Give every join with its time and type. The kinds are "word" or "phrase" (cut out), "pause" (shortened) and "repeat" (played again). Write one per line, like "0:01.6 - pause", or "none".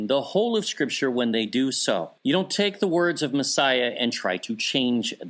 0:02.2 - pause